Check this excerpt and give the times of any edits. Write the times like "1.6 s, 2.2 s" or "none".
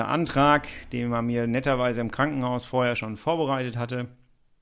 none